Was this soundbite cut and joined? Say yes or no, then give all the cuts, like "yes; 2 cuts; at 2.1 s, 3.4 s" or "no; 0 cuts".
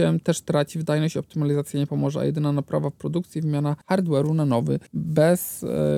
yes; 2 cuts; at 3.8 s, 4.9 s